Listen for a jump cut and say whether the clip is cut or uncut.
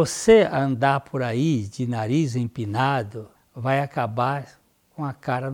cut